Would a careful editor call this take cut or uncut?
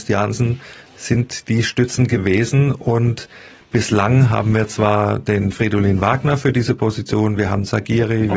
uncut